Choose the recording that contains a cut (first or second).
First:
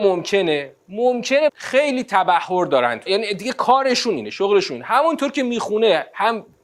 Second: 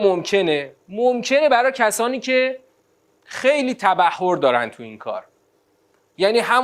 first